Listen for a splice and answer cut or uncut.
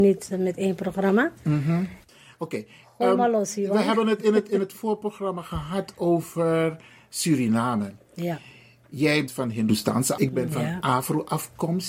cut